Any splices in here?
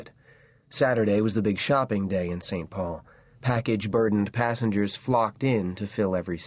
no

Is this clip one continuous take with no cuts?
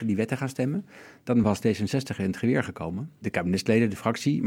yes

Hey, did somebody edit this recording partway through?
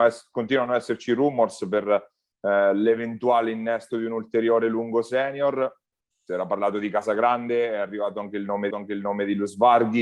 yes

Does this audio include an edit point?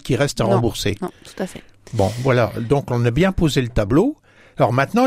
no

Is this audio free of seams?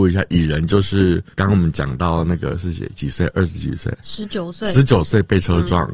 no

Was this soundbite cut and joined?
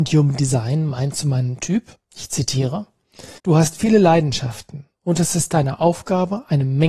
yes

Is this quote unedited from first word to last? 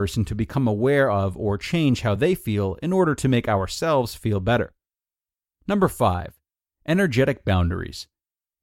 yes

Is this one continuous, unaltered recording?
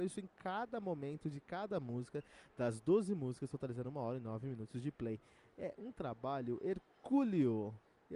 yes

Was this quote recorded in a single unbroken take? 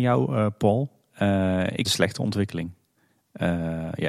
no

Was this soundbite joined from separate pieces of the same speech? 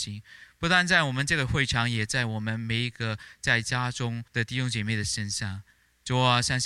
yes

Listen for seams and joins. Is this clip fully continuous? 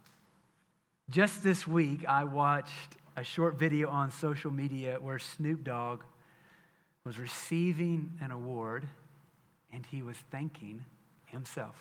yes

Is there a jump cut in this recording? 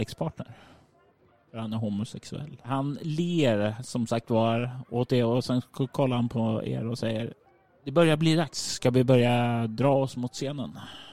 no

